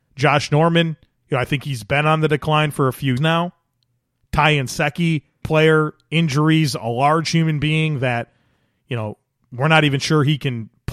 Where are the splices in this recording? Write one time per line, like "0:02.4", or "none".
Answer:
0:01.1
0:03.2
0:05.4